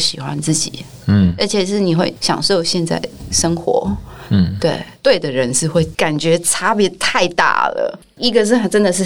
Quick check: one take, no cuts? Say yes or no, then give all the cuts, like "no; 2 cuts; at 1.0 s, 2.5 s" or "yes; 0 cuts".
yes; 0 cuts